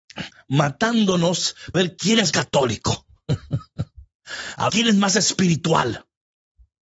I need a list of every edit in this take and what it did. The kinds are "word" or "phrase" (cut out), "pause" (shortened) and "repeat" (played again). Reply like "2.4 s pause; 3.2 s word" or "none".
1.7 s word; 2.3 s word; 4.7 s word